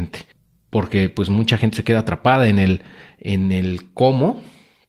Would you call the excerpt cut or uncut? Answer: uncut